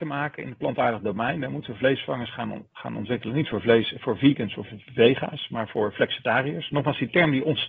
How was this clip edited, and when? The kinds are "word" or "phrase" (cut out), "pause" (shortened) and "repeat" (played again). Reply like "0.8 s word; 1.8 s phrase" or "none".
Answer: none